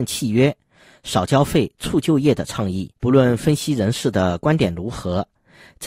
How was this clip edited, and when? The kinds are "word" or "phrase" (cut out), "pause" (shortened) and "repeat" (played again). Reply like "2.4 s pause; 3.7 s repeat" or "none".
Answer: 3.0 s pause